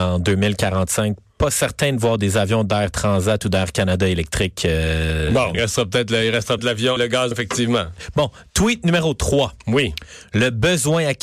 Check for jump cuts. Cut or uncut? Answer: cut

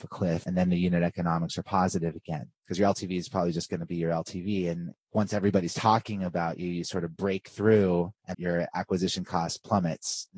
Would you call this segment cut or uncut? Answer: cut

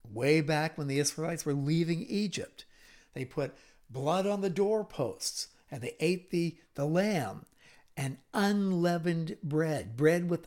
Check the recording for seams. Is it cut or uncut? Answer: uncut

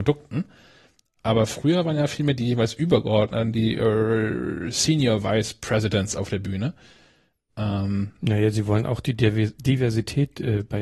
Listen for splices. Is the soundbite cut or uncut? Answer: cut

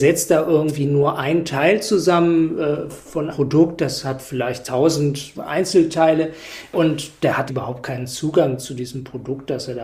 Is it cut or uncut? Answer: cut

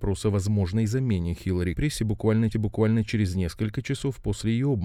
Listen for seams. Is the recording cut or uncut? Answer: cut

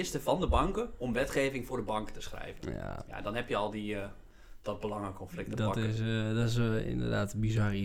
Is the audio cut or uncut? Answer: uncut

